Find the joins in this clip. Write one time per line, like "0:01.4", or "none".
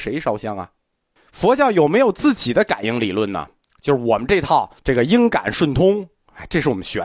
0:01.2
0:03.6
0:04.8